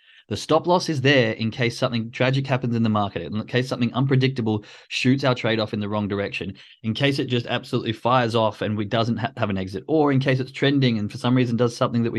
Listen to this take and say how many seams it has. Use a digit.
0